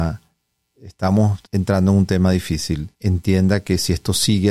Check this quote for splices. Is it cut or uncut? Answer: cut